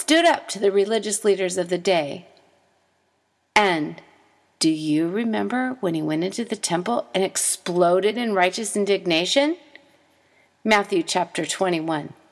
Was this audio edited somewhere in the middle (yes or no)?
no